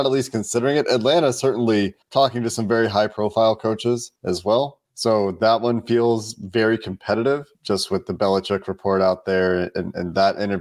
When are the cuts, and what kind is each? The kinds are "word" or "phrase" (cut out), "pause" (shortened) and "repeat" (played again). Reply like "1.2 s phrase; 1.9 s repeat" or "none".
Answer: 2.0 s pause; 4.2 s pause; 4.8 s pause; 7.5 s pause